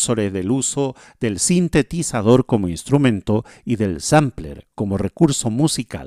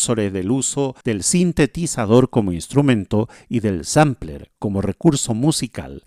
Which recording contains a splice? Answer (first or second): second